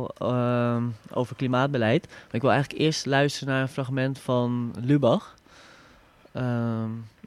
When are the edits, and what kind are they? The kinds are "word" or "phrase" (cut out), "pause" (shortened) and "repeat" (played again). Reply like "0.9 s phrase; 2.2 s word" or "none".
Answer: none